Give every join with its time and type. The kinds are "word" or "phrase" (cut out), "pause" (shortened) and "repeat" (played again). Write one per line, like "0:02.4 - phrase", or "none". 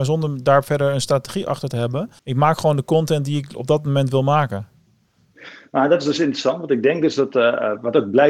0:02.2 - pause